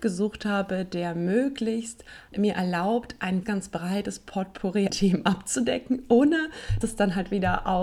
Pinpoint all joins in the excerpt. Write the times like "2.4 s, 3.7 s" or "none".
2.3 s, 3.4 s, 4.9 s, 6.8 s